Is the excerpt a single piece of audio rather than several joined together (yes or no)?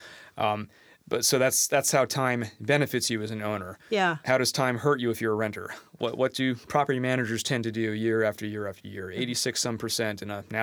yes